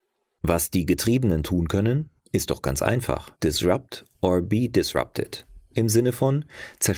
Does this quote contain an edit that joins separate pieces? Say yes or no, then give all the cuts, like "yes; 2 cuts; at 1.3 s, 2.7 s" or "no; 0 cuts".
yes; 2 cuts; at 2.2 s, 3.3 s